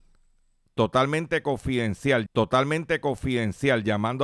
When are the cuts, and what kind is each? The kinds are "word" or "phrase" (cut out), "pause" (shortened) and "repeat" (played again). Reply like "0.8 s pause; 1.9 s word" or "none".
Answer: 2.3 s repeat

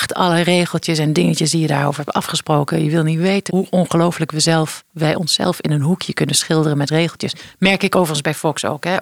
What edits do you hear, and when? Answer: 3.5 s word

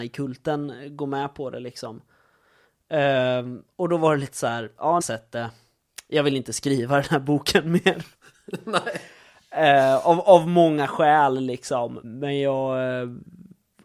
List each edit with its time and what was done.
5.0 s phrase; 8.1 s pause; 12.0 s word

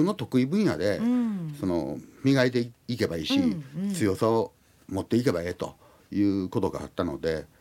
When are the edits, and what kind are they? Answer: none

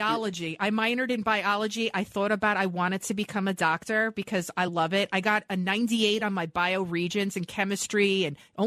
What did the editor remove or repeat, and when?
none

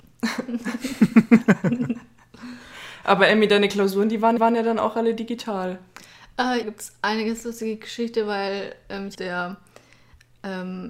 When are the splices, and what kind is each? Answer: 4.4 s repeat; 6.6 s phrase; 9.1 s phrase

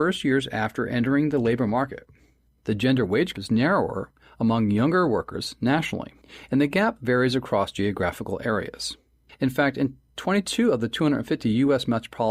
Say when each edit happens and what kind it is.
3.3 s word

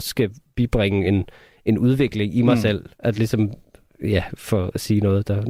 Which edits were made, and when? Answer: none

